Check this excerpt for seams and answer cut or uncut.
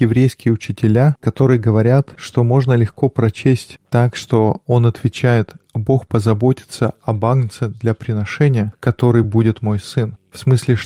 uncut